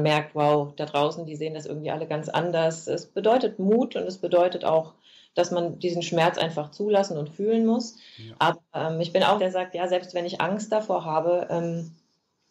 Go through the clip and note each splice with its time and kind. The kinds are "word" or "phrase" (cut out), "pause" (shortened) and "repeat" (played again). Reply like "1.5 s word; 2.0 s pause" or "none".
9.4 s word